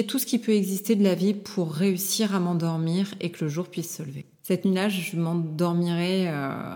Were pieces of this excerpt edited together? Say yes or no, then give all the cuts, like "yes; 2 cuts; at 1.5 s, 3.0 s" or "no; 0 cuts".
yes; 1 cut; at 4.3 s